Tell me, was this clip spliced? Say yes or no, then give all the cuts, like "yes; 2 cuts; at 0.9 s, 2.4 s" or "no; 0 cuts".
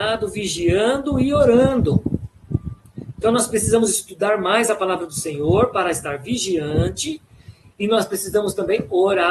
no; 0 cuts